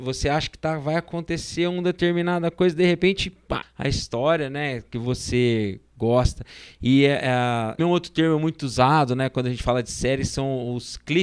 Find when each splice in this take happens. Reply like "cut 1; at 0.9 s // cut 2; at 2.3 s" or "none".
cut 1; at 3.6 s // cut 2; at 7.8 s